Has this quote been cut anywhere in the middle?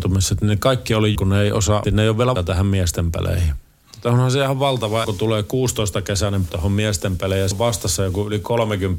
yes; 6 cuts; at 1.1 s, 1.8 s, 2.3 s, 5.0 s, 6.5 s, 7.5 s

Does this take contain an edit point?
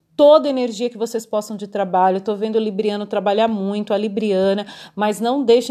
no; 0 cuts

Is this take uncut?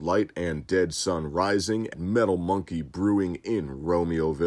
no; 1 cut; at 1.9 s

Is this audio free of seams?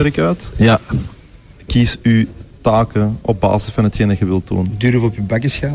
yes; 0 cuts

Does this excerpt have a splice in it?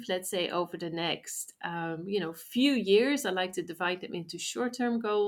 no; 0 cuts

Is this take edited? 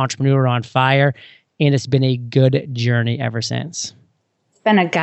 no; 0 cuts

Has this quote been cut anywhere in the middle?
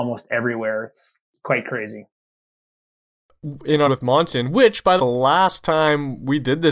yes; 2 cuts; at 3.9 s, 5.0 s

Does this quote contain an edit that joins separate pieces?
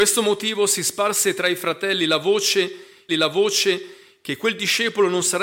yes; 1 cut; at 3.1 s

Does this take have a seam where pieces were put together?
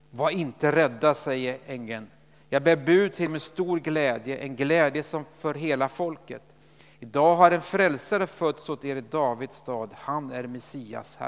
yes; 1 cut; at 3.3 s

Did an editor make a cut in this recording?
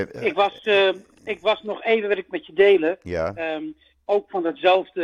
no; 0 cuts

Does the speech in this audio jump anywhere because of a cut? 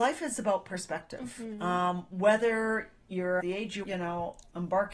yes; 2 cuts; at 3.4 s, 3.8 s

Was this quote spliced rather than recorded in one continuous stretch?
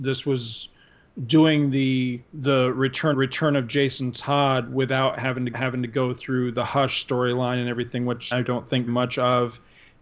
yes; 5 cuts; at 2.3 s, 3.1 s, 5.5 s, 8.3 s, 8.9 s

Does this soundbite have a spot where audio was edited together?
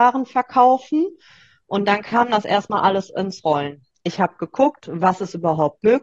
no; 0 cuts

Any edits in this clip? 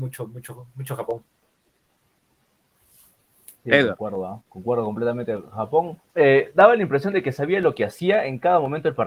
yes; 3 cuts; at 3.6 s, 4.5 s, 6.0 s

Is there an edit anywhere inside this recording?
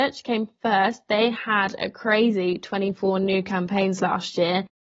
no; 0 cuts

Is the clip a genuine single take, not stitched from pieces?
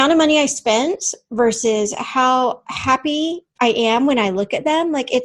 yes; 0 cuts

